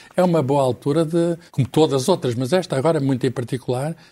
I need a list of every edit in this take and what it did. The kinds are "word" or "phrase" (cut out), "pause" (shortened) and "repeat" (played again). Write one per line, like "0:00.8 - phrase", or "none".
0:01.5 - pause